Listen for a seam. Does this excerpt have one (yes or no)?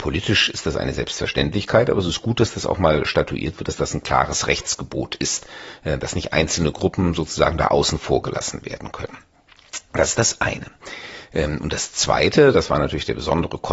no